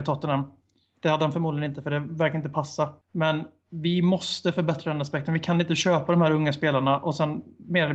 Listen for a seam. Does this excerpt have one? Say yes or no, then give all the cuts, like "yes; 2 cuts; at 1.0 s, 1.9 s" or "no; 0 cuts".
yes; 1 cut; at 3.0 s